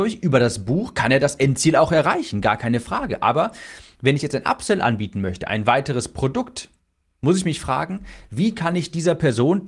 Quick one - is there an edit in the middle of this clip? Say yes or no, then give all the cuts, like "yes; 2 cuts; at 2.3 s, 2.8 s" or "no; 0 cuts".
no; 0 cuts